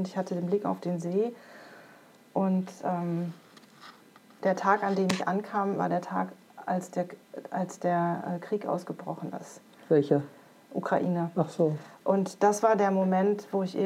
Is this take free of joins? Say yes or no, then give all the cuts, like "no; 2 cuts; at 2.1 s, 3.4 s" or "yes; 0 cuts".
yes; 0 cuts